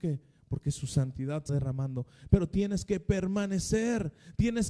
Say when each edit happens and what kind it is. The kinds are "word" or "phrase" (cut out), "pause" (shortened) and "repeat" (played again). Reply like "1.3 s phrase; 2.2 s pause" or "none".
1.5 s word

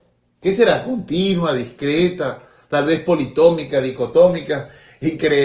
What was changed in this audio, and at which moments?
none

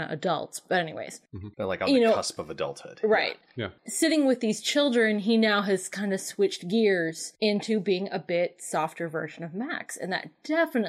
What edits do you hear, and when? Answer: 1.5 s pause; 7.3 s pause

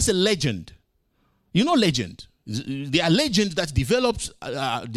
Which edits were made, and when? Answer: none

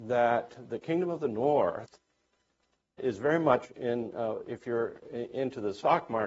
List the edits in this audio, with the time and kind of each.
3.0 s word; 4.4 s word

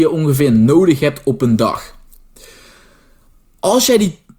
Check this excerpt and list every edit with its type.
none

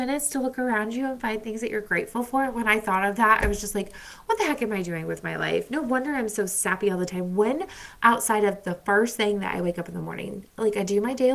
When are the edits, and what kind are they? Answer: none

